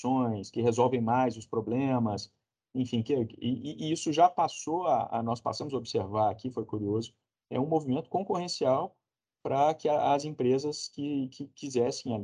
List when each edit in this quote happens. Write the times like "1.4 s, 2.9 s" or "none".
none